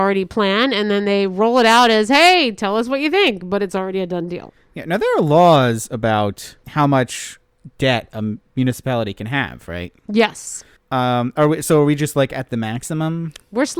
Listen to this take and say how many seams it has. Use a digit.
1